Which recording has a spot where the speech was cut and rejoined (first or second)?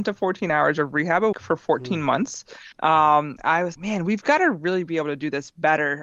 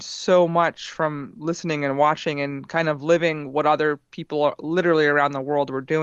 first